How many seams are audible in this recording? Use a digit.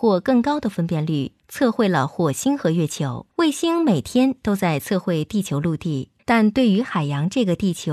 2